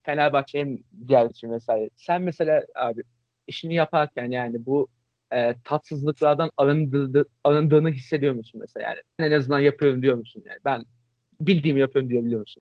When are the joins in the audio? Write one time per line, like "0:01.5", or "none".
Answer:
0:01.3
0:09.2